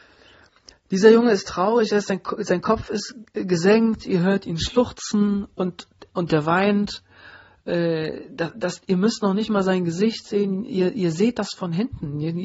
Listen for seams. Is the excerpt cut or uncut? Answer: uncut